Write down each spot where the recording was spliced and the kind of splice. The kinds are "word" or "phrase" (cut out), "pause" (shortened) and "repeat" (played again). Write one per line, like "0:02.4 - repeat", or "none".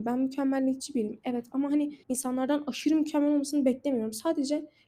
0:02.0 - pause